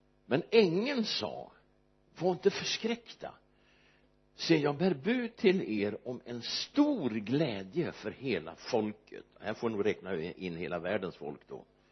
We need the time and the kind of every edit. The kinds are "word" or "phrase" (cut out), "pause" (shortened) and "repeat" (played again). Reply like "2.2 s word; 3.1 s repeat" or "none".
none